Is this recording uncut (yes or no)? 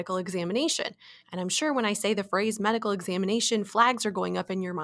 no